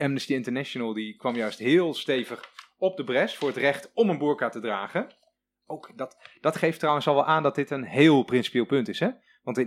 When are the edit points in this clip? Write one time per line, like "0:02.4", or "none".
none

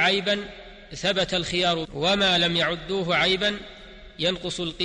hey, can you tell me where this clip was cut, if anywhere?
0:01.8

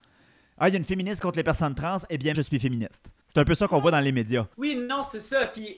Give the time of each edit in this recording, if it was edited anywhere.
0:01.2
0:02.3
0:03.2
0:04.5

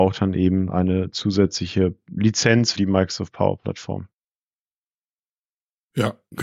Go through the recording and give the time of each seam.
0:02.7

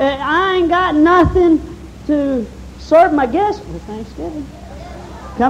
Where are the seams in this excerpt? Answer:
none

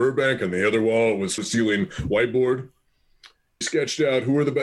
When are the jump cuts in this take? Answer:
0:01.4
0:03.6

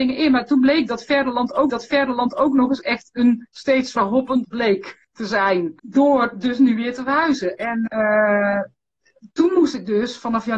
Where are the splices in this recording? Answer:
0:01.7
0:04.0
0:04.4
0:05.0
0:05.8
0:07.9

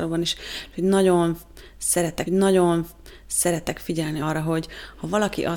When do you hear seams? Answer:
0:02.3
0:04.2

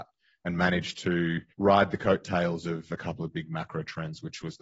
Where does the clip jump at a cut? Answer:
0:01.5

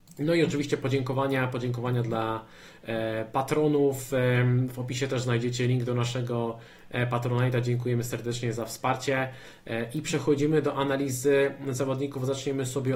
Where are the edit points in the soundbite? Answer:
none

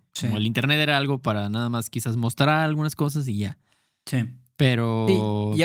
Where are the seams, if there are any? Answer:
none

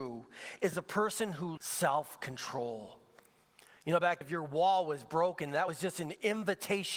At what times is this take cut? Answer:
0:01.6
0:04.2

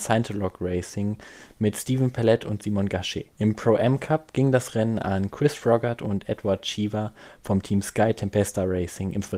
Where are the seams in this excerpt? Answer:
0:03.3

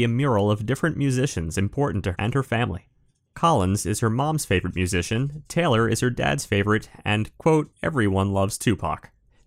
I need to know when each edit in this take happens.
0:02.1

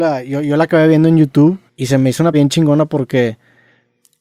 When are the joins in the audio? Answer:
0:01.7
0:02.3

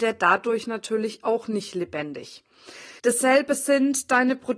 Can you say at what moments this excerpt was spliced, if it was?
0:03.0

